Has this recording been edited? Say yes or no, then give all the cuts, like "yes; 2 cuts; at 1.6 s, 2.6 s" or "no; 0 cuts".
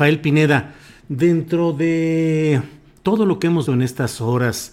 yes; 1 cut; at 3.7 s